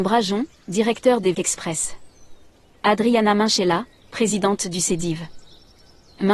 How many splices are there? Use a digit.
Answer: 1